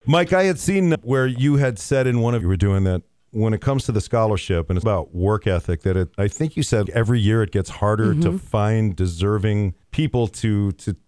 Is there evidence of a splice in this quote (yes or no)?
yes